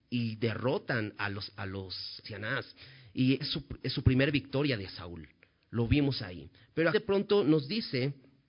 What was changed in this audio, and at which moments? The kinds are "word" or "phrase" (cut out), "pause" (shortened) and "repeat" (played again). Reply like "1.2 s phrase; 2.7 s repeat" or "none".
2.2 s word; 3.4 s word; 6.9 s word